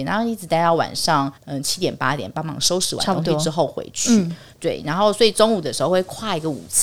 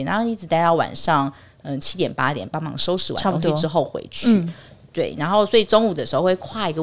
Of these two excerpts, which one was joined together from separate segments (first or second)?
first